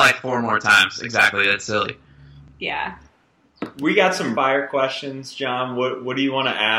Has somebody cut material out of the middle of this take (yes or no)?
yes